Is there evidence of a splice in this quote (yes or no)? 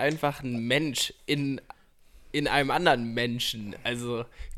no